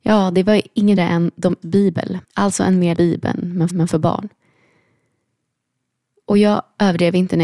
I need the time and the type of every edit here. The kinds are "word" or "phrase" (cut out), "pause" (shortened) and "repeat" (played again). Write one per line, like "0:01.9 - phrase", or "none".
0:01.0 - word
0:01.6 - word
0:02.2 - pause
0:02.9 - phrase
0:03.7 - repeat

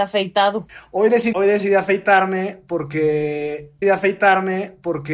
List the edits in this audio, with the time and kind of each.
0:01.3 - word
0:03.8 - repeat

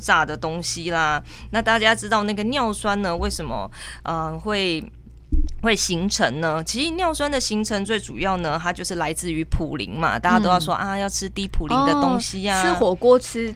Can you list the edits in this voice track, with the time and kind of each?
none

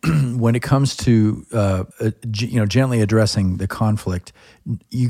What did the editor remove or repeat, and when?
0:01.9 - pause

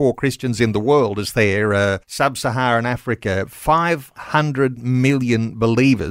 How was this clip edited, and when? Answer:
0:02.0 - pause

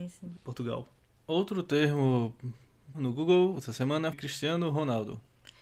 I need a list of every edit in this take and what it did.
0:02.9 - word
0:04.1 - word

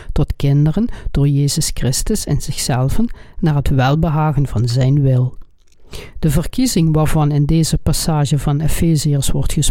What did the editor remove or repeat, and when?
none

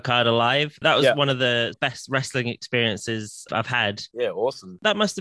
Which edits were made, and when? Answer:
0:01.7 - word
0:03.5 - word

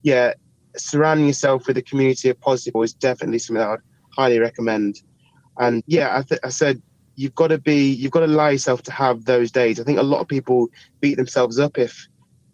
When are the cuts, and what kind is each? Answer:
0:02.7 - word
0:05.8 - word

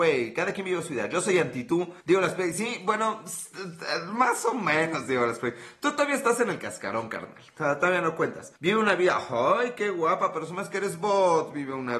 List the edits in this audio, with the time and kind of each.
0:02.0 - pause
0:08.6 - pause

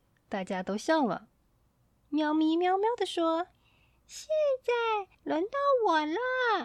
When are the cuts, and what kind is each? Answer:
0:03.5 - pause

